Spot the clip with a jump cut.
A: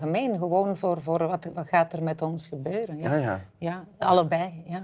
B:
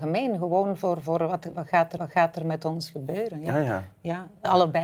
B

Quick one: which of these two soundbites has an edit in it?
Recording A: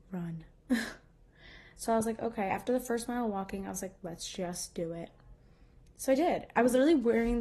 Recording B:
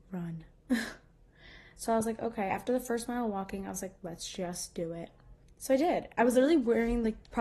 B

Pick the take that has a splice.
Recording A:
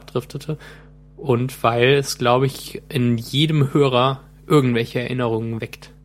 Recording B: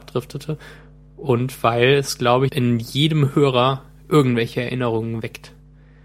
B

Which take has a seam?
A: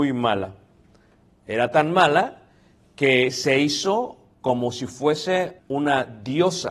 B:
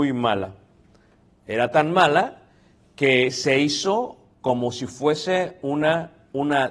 A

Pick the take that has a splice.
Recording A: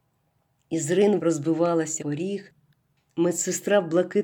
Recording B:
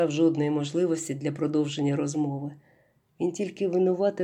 A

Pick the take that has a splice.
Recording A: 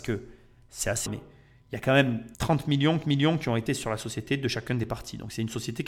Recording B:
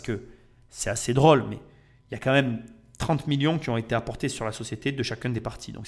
A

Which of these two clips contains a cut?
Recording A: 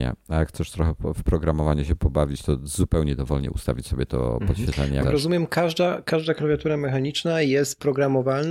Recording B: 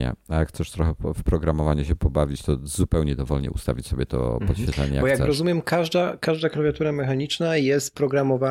A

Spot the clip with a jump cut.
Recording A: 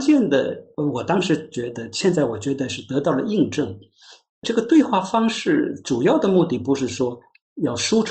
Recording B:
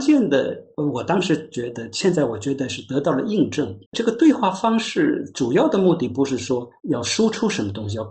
B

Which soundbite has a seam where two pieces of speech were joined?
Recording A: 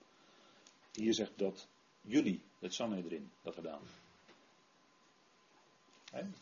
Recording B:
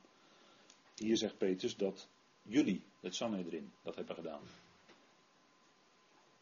A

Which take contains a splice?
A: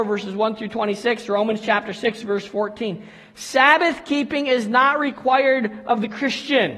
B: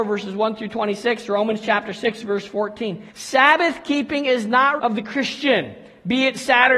B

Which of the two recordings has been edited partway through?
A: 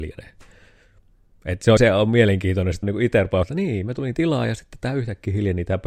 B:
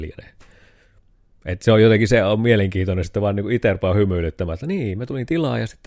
A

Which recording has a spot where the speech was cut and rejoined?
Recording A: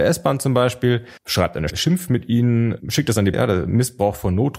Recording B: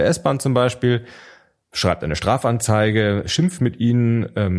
A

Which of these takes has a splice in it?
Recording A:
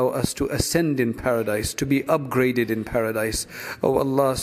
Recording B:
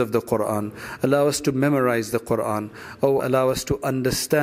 B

